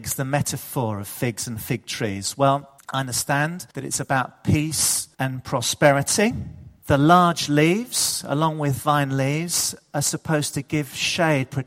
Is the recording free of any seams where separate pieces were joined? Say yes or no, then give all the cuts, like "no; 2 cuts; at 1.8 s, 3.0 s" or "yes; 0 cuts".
no; 4 cuts; at 2.8 s, 3.7 s, 5.1 s, 6.8 s